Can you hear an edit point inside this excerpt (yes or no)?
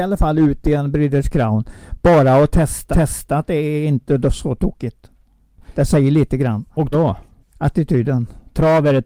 yes